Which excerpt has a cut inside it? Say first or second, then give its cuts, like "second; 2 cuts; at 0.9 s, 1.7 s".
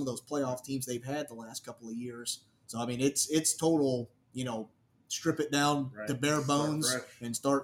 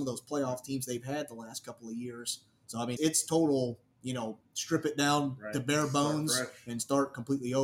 second; 2 cuts; at 3.0 s, 4.4 s